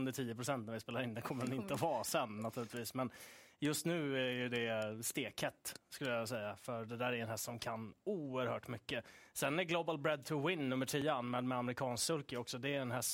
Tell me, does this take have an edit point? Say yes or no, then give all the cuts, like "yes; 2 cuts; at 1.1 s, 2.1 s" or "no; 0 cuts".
no; 0 cuts